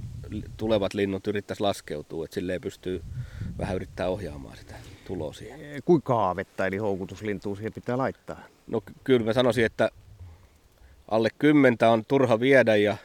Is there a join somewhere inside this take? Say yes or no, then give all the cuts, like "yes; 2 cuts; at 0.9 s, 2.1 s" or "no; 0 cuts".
yes; 1 cut; at 6.0 s